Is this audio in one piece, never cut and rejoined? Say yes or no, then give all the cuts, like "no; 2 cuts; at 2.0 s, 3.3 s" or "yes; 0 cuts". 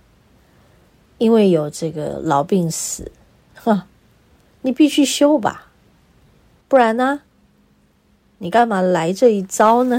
yes; 0 cuts